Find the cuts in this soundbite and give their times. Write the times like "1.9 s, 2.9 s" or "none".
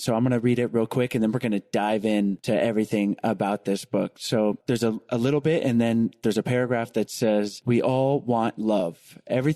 none